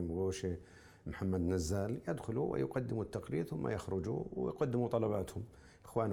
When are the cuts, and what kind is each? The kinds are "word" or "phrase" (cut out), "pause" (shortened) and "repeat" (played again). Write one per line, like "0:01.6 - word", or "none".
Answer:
none

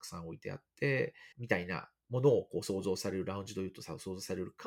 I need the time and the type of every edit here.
0:01.3 - pause

